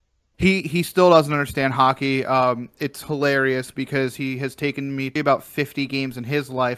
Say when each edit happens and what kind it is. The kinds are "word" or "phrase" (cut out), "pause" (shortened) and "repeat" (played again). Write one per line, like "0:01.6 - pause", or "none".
0:05.2 - word